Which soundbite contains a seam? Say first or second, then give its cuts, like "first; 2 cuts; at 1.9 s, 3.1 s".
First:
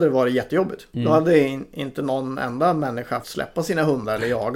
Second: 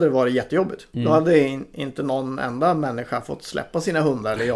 first; 1 cut; at 3.2 s